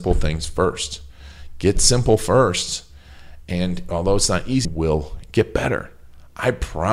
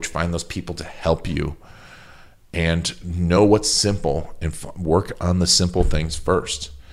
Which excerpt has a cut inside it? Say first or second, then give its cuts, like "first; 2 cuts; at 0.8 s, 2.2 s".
first; 1 cut; at 4.6 s